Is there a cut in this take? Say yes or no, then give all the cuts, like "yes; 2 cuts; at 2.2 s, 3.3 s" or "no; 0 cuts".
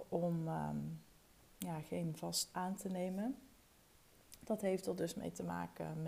yes; 1 cut; at 2.5 s